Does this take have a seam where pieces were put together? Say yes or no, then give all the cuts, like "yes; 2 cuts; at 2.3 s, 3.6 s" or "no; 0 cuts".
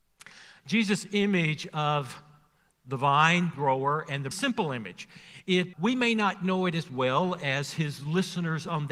yes; 3 cuts; at 3.5 s, 4.3 s, 5.7 s